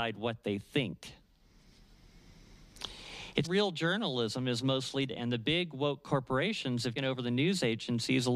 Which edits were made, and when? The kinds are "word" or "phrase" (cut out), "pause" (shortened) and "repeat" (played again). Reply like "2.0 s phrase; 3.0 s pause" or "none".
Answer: 3.4 s word; 5.1 s word; 7.0 s word